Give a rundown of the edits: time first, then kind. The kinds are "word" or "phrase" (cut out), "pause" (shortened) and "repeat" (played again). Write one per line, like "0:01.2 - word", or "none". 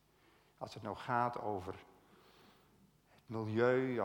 none